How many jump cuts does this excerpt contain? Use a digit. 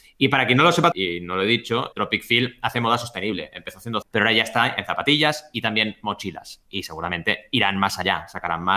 3